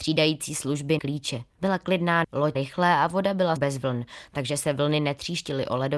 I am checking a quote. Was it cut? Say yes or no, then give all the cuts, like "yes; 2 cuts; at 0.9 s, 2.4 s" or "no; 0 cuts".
yes; 5 cuts; at 1.0 s, 1.5 s, 2.2 s, 2.5 s, 3.6 s